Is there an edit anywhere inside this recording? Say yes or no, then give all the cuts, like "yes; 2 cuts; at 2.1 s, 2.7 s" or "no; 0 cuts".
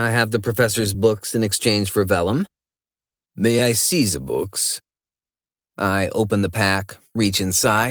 no; 0 cuts